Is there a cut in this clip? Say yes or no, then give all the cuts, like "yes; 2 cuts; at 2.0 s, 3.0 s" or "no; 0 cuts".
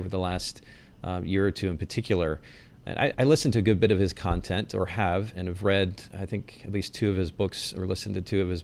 yes; 2 cuts; at 3.1 s, 5.3 s